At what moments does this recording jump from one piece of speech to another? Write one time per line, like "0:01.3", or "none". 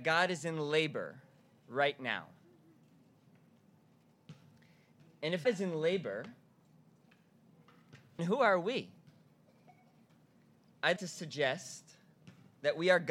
0:05.4
0:08.2
0:11.0